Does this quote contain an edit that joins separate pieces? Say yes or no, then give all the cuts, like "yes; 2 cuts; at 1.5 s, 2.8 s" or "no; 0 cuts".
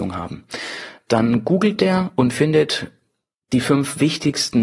no; 0 cuts